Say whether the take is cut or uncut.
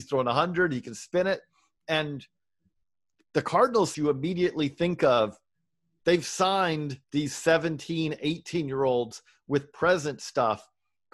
cut